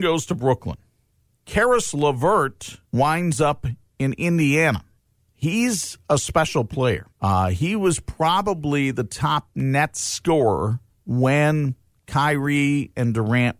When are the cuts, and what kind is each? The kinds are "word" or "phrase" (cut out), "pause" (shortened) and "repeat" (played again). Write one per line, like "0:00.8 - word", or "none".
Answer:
0:01.1 - pause
0:02.8 - pause
0:05.0 - pause
0:07.1 - pause
0:10.9 - pause